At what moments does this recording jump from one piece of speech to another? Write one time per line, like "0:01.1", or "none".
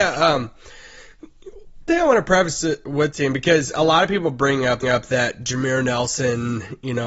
0:01.9
0:03.1
0:04.8